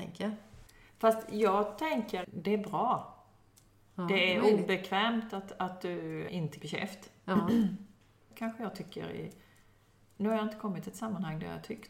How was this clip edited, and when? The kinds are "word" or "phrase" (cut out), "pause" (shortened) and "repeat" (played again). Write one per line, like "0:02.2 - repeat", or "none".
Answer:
0:02.2 - word
0:06.3 - word
0:06.6 - word